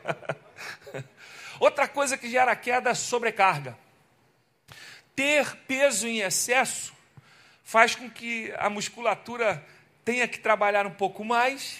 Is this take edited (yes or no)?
no